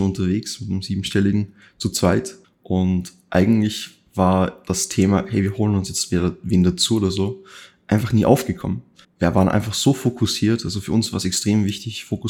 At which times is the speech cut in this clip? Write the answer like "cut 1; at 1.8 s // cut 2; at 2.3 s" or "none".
cut 1; at 2.4 s // cut 2; at 9.0 s